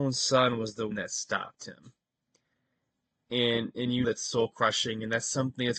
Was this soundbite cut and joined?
yes; 2 cuts; at 0.9 s, 4.0 s

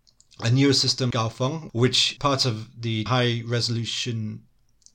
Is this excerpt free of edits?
no; 3 cuts; at 1.1 s, 2.2 s, 3.1 s

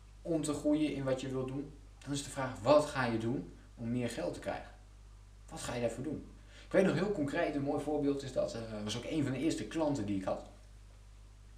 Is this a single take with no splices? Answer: yes; 0 cuts

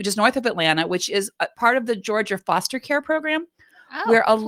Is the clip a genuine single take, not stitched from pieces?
yes; 0 cuts

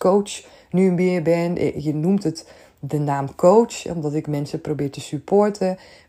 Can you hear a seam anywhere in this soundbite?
no; 0 cuts

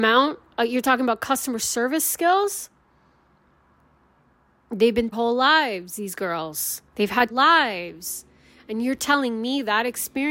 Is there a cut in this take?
yes; 3 cuts; at 5.1 s, 6.9 s, 7.3 s

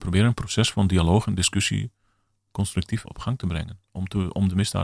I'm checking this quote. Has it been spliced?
yes; 1 cut; at 3.0 s

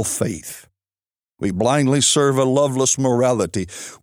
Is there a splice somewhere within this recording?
no; 0 cuts

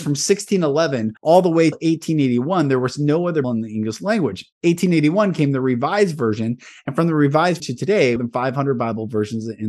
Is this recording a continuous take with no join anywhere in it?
no; 6 cuts; at 1.2 s, 1.7 s, 3.4 s, 4.5 s, 7.6 s, 8.2 s

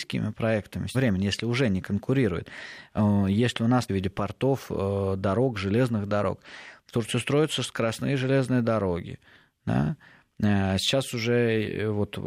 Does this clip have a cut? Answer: yes; 2 cuts; at 0.9 s, 3.9 s

